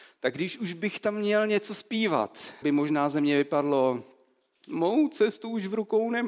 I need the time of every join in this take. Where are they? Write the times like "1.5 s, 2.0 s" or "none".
2.6 s